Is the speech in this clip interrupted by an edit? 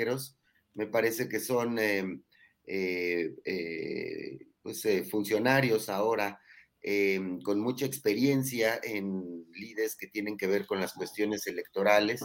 no; 0 cuts

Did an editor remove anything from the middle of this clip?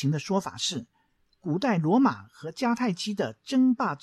no; 0 cuts

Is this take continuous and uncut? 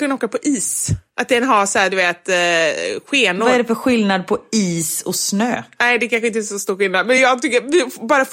yes; 0 cuts

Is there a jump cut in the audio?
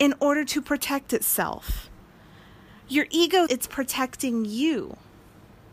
yes; 1 cut; at 3.5 s

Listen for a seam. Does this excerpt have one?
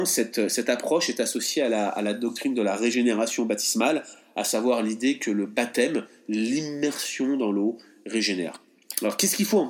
no; 0 cuts

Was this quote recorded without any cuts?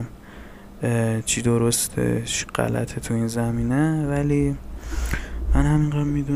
yes; 0 cuts

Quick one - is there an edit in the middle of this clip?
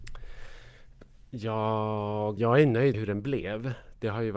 yes; 2 cuts; at 2.4 s, 2.9 s

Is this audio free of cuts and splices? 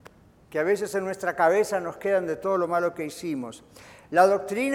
yes; 0 cuts

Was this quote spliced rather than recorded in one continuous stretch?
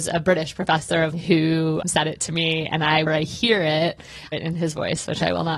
yes; 4 cuts; at 1.1 s, 1.8 s, 3.1 s, 4.3 s

